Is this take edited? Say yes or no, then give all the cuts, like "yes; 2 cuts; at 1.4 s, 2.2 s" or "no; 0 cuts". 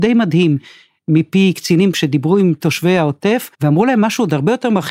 yes; 2 cuts; at 1.9 s, 3.5 s